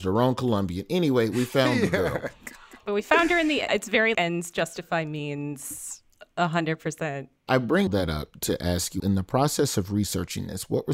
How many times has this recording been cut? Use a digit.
4